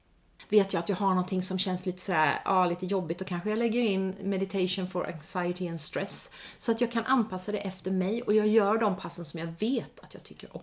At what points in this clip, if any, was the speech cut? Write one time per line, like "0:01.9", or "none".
none